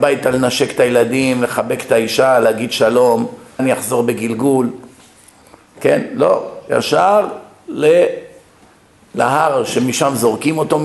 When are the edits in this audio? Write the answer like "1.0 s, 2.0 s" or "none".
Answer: 3.6 s